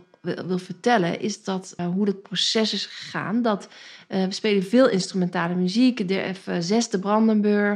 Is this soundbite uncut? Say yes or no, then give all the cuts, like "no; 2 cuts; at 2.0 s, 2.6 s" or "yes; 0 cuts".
no; 1 cut; at 1.8 s